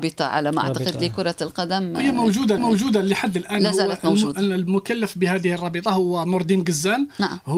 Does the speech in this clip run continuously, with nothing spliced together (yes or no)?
no